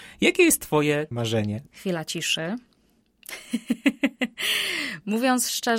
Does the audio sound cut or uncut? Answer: cut